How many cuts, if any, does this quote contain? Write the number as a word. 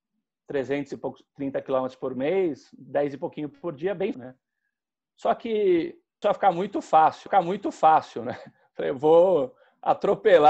three